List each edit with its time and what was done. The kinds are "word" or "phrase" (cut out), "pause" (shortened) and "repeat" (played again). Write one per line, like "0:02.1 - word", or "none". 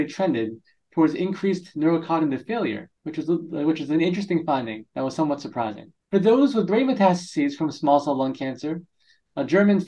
0:03.0 - pause
0:04.9 - pause
0:06.0 - pause

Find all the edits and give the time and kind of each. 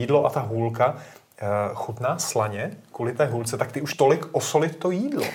0:03.9 - word

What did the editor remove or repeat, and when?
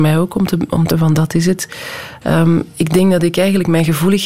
0:00.9 - word

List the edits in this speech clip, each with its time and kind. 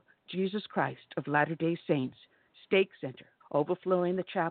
0:03.4 - pause

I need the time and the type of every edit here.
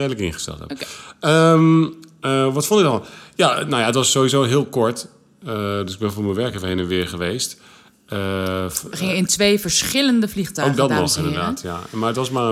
none

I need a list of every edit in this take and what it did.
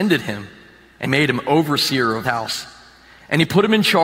0:01.1 - word
0:02.2 - word

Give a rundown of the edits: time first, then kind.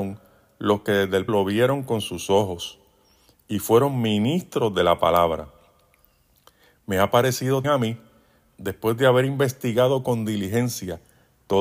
0:01.3 - word
0:07.6 - word

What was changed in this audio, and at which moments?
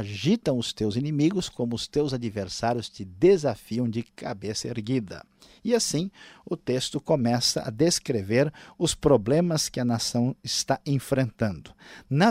none

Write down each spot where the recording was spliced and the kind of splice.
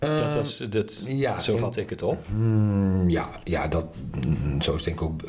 none

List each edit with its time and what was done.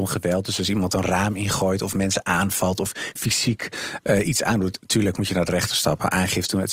none

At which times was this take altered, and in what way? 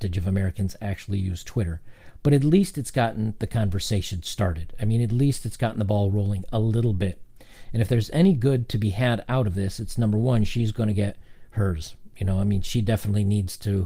none

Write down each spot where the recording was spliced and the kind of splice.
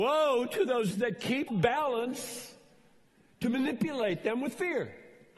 0:00.9 - word
0:01.5 - phrase

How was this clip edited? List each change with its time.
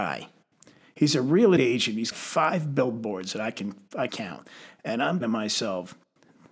0:01.6 - word
0:02.1 - word
0:04.1 - word
0:05.2 - word

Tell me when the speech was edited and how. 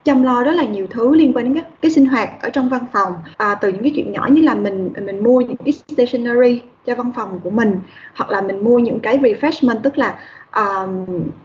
0:01.8 - pause
0:03.3 - pause

